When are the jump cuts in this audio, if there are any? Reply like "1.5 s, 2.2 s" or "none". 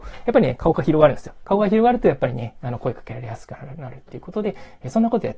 none